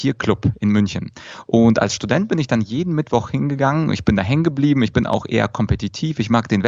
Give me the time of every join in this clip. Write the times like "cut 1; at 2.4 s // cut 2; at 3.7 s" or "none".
none